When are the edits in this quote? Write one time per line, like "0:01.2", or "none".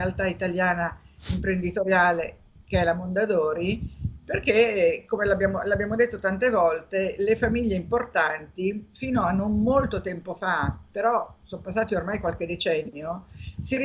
none